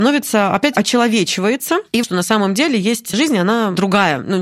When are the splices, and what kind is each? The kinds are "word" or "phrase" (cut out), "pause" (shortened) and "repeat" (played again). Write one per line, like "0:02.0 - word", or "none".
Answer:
0:02.0 - word
0:03.1 - word